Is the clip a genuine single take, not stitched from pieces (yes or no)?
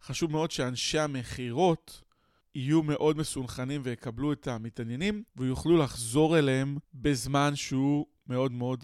no